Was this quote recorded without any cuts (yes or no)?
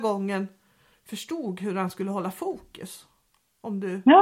yes